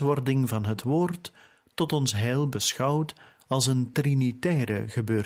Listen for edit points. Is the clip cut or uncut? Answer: uncut